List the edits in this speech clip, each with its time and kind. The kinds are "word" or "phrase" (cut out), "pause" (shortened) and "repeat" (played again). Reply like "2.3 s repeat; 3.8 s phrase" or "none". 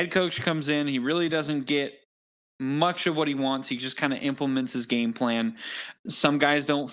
none